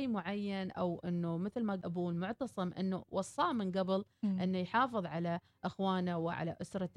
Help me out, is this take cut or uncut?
cut